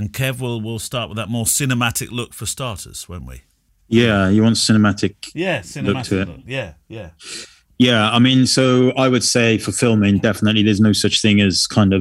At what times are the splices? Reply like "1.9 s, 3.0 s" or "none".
none